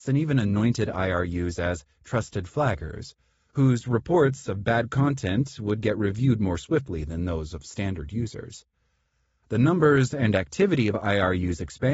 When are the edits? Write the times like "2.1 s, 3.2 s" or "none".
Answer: none